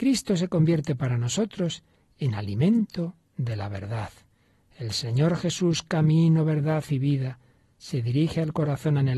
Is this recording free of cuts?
yes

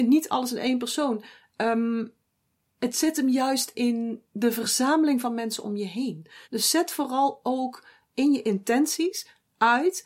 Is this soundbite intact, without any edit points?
no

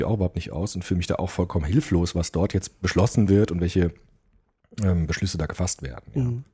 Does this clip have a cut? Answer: no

